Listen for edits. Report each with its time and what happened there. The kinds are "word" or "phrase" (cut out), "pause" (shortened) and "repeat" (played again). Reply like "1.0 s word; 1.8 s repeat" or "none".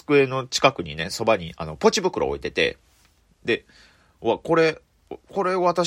none